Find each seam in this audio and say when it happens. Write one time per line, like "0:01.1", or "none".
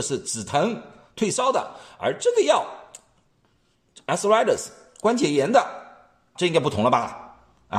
0:06.4